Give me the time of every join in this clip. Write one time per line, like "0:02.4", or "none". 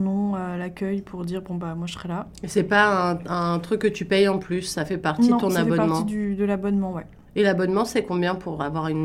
none